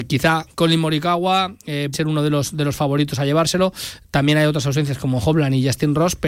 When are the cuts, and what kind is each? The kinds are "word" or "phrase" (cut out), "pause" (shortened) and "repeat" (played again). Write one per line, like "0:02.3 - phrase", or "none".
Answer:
0:01.9 - word